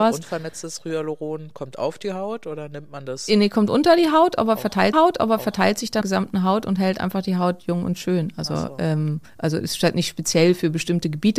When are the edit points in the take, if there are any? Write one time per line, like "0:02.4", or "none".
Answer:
0:04.9
0:06.0
0:09.3